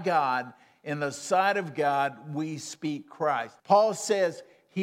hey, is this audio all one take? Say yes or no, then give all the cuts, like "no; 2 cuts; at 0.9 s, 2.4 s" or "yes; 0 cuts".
no; 1 cut; at 3.6 s